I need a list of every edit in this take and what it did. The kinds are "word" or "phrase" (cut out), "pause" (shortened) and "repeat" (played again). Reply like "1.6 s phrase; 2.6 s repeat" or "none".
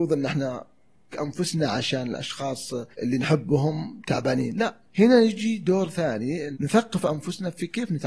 1.1 s word; 2.9 s pause; 4.9 s pause; 6.5 s word

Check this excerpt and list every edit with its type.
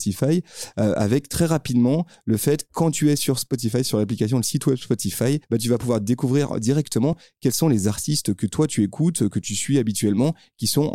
5.4 s pause

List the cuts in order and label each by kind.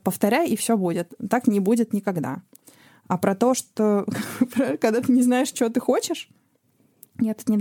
none

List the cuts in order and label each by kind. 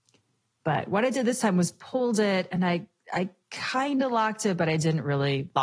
none

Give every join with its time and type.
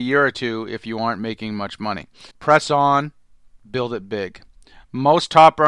2.3 s pause

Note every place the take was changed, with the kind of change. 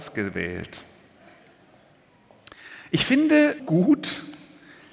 3.6 s word

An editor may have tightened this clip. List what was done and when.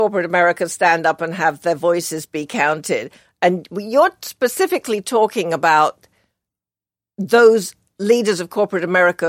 none

